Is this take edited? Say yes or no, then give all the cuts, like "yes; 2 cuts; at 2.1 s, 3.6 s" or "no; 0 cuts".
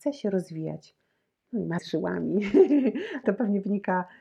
yes; 2 cuts; at 1.8 s, 3.2 s